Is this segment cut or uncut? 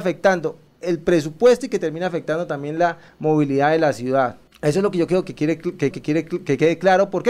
cut